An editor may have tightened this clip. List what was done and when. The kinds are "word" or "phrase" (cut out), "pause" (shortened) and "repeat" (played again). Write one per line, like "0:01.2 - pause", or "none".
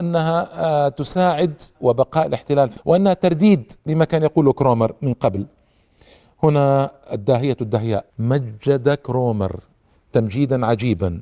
0:01.7 - word
0:02.8 - word
0:03.8 - pause
0:08.1 - pause